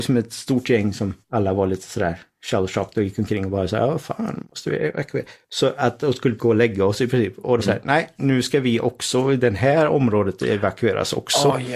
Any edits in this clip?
yes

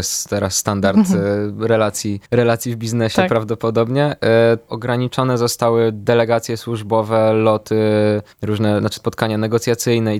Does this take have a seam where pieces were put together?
yes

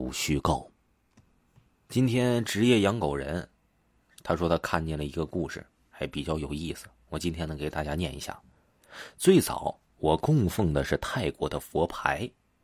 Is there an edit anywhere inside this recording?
no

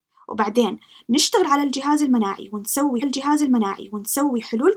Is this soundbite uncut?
no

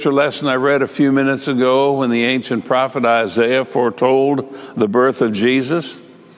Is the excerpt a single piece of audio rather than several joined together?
yes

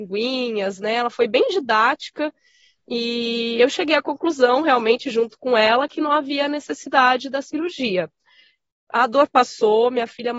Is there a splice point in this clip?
no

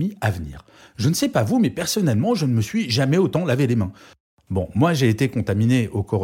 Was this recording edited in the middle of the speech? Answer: no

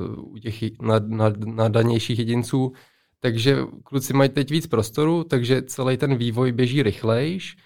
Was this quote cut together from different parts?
no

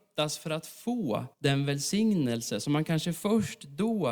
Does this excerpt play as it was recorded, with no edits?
no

